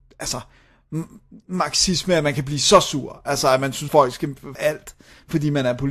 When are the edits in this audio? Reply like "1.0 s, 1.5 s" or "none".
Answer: 1.4 s, 3.9 s, 4.6 s